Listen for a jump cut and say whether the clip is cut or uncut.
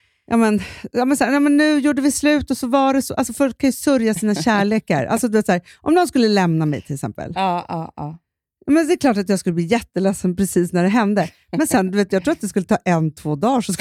uncut